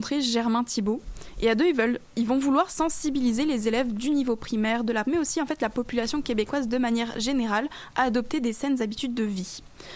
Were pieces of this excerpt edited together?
yes; 1 cut; at 5.0 s

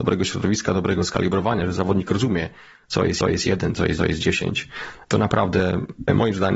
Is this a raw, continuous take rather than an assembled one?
no; 2 cuts; at 3.2 s, 4.0 s

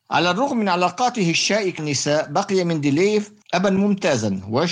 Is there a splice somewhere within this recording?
yes; 2 cuts; at 1.8 s, 3.4 s

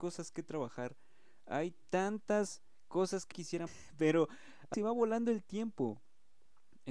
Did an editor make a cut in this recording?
yes; 3 cuts; at 3.3 s, 3.7 s, 4.7 s

